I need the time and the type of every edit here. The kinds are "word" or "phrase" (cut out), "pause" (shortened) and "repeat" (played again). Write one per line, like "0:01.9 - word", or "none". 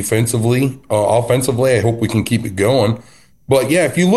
none